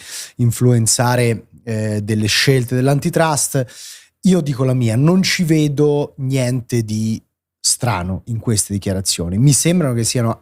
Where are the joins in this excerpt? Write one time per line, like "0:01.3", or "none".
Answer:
none